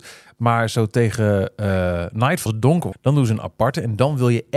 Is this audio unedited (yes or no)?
no